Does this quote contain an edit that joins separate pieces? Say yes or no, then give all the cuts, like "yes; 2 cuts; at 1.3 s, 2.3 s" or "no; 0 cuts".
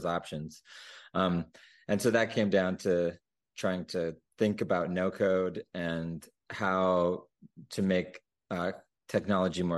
no; 0 cuts